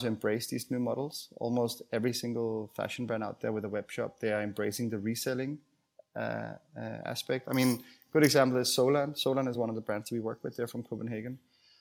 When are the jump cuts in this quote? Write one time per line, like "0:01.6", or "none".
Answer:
none